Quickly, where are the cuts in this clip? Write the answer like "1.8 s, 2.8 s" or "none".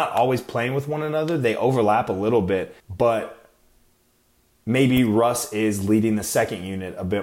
2.8 s